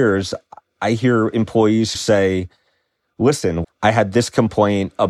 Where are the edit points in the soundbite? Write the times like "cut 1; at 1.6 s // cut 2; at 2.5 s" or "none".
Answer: cut 1; at 1.9 s // cut 2; at 3.6 s